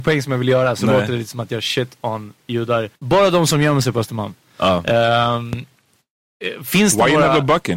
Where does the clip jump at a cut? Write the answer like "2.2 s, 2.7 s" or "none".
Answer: 3.0 s